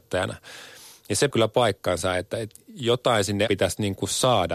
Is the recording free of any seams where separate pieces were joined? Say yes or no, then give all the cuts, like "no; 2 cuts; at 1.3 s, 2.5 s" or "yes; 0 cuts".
no; 2 cuts; at 1.3 s, 3.5 s